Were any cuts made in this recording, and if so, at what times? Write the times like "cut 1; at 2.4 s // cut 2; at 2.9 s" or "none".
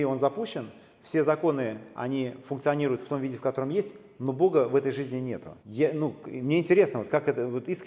cut 1; at 5.6 s